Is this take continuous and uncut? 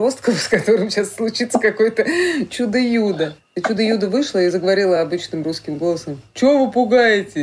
yes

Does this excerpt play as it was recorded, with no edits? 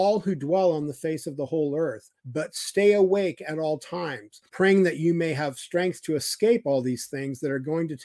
no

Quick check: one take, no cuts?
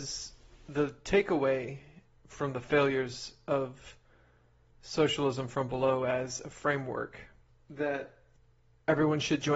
yes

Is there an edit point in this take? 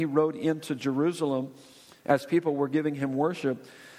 no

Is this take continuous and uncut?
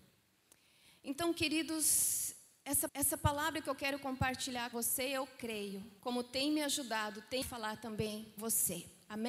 no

